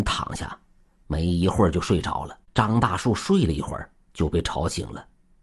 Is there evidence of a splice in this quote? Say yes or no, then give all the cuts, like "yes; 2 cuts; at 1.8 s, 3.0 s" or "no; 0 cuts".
yes; 2 cuts; at 2.4 s, 4.0 s